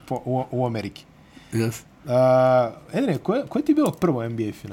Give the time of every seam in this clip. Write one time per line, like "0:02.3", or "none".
none